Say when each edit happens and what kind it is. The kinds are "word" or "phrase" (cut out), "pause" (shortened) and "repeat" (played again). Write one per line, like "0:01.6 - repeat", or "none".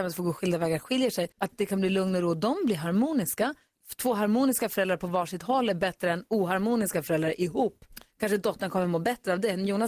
0:01.3 - pause